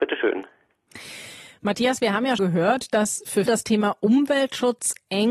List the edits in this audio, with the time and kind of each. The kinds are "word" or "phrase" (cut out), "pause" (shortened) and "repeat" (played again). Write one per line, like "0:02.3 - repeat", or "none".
0:02.4 - word
0:03.5 - word